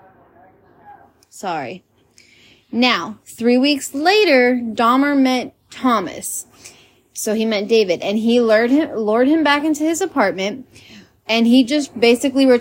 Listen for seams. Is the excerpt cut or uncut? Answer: uncut